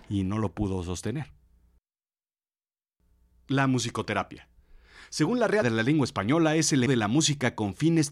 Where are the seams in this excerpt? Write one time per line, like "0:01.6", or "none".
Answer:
0:05.6
0:06.9

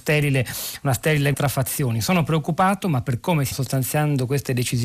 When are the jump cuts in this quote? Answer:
0:01.3
0:03.5

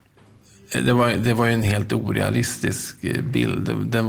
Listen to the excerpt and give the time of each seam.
none

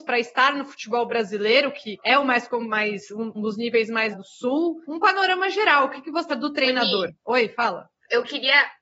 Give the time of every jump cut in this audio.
0:03.3
0:04.1
0:04.8
0:06.3
0:07.2

